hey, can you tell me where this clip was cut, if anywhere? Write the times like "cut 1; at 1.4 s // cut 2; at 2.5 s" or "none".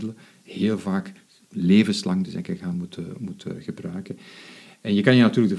none